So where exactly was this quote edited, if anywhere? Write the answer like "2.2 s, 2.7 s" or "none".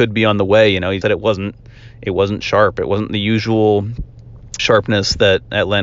1.0 s, 4.6 s